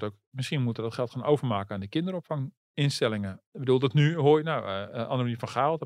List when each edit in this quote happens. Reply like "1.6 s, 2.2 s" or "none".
none